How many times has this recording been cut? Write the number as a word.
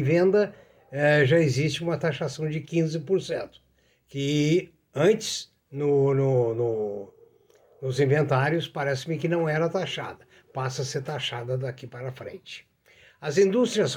zero